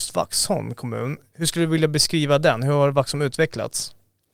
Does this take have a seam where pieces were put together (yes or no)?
no